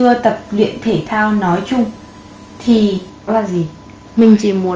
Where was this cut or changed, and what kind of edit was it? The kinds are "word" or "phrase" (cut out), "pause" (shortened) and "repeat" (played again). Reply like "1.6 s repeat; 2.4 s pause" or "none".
3.3 s word